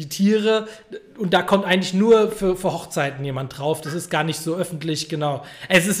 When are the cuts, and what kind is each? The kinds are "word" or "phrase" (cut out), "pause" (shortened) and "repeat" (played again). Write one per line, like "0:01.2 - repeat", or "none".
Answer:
none